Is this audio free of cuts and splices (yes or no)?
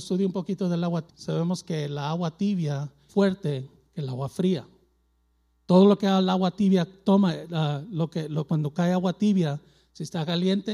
no